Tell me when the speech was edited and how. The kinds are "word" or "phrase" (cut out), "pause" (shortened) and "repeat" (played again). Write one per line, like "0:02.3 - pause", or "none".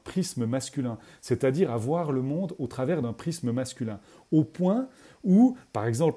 none